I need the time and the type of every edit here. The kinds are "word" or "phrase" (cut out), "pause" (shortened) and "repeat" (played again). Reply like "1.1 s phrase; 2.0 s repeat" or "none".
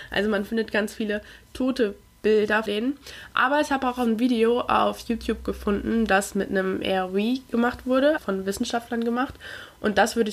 2.7 s word; 8.2 s word

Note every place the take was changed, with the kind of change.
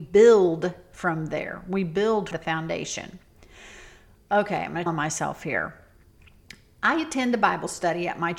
2.3 s word; 4.9 s word

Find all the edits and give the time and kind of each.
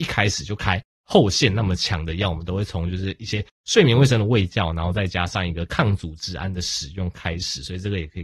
none

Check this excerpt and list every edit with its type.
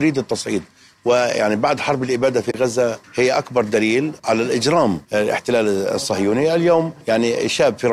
3.0 s pause; 4.2 s pause; 5.0 s pause; 7.0 s pause

